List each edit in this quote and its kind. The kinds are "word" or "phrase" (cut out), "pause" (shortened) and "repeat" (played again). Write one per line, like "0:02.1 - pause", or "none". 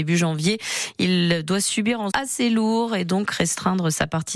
0:02.1 - phrase